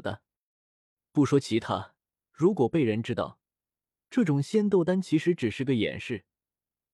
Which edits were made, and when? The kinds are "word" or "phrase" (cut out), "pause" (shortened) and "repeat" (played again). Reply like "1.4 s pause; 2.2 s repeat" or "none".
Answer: none